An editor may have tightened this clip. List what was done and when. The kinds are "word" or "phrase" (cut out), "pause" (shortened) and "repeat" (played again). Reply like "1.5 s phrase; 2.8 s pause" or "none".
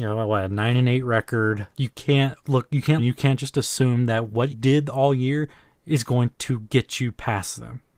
1.7 s pause; 2.4 s word; 3.0 s phrase; 4.5 s word